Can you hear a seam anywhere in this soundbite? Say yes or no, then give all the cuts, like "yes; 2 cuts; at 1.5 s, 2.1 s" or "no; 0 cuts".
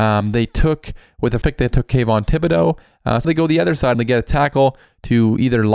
yes; 3 cuts; at 1.4 s, 3.2 s, 3.9 s